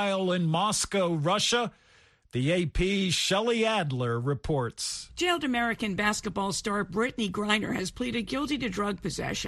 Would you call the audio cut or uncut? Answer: uncut